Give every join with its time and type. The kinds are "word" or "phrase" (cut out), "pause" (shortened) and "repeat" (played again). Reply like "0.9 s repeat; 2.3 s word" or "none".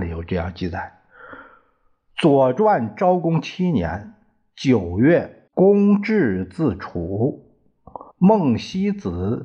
5.5 s pause; 8.1 s pause